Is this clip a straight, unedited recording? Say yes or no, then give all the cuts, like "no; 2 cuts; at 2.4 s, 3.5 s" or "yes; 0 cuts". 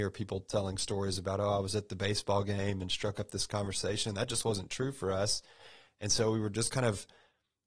yes; 0 cuts